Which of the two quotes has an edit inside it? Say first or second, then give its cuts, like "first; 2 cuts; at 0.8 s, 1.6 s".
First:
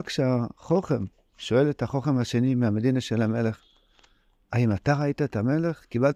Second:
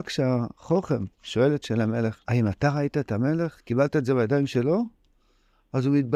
second; 3 cuts; at 1.1 s, 1.6 s, 2.2 s